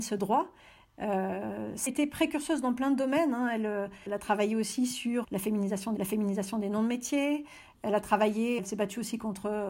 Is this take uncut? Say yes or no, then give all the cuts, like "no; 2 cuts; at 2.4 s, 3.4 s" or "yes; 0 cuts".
no; 5 cuts; at 1.9 s, 4.1 s, 5.2 s, 6.0 s, 8.6 s